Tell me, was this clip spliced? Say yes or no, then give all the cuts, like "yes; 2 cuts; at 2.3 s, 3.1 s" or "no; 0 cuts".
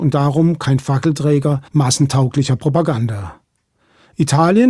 yes; 1 cut; at 1.7 s